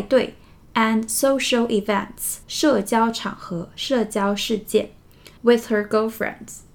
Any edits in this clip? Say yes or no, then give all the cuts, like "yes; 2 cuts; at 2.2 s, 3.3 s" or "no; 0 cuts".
yes; 2 cuts; at 2.4 s, 5.4 s